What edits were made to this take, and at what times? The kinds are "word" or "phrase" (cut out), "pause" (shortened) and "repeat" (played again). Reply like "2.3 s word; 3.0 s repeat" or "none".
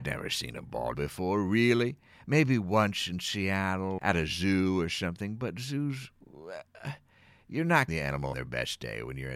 0.9 s word; 4.0 s word; 7.9 s word; 8.3 s word